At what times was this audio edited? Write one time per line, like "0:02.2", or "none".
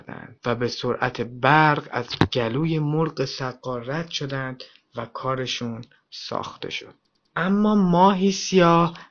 none

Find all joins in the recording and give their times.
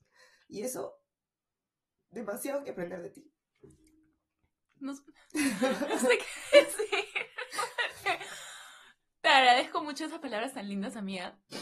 none

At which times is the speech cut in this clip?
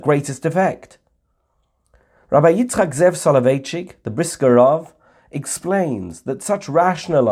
none

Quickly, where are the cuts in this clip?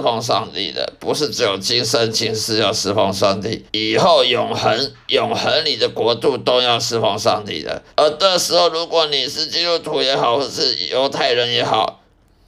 0:03.7
0:07.9

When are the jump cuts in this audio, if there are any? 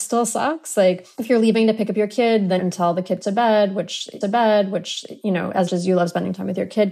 0:02.6
0:03.2
0:04.2
0:05.7

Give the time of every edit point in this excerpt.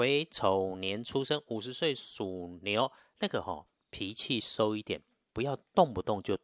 none

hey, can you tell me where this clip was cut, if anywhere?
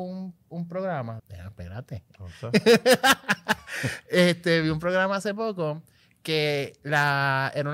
0:01.2

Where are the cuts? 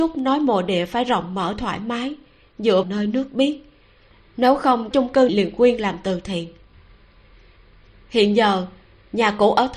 0:02.8
0:04.9
0:05.3

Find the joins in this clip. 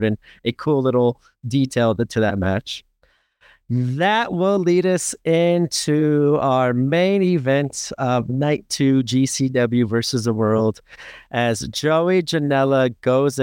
none

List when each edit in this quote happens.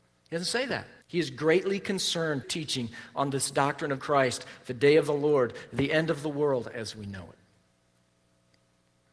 0:01.0
0:02.4
0:04.0

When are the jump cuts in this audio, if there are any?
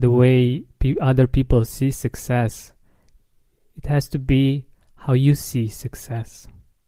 none

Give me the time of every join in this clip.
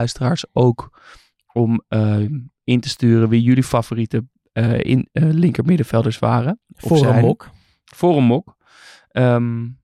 none

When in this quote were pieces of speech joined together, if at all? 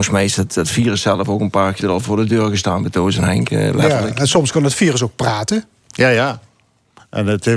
0:01.8

